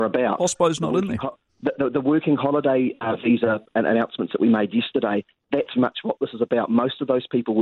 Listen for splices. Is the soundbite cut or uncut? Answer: cut